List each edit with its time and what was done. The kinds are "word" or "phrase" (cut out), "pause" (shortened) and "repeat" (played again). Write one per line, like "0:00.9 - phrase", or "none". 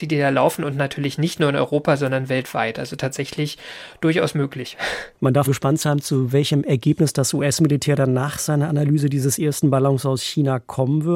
0:05.1 - pause
0:05.4 - word

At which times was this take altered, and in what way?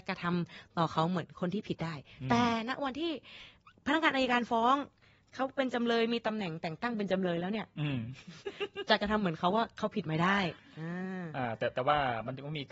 none

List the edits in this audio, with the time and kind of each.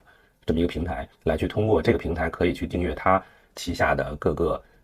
0:01.1 - pause

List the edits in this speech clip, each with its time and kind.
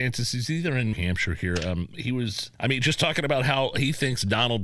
0:00.9 - phrase
0:02.5 - pause

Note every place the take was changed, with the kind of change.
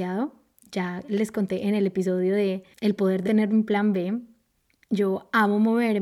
0:03.2 - word

